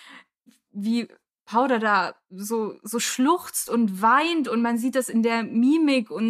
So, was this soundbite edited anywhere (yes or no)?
no